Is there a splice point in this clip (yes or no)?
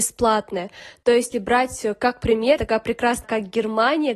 yes